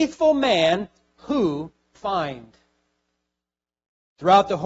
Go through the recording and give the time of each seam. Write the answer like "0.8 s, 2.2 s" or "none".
1.9 s